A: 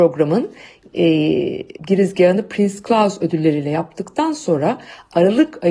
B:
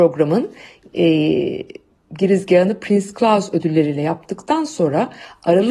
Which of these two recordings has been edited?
A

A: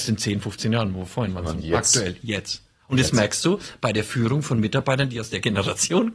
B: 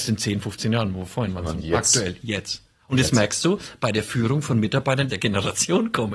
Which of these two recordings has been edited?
B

